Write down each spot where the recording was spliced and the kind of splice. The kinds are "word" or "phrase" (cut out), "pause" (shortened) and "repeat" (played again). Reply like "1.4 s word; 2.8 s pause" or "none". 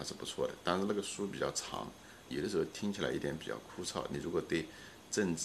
2.3 s word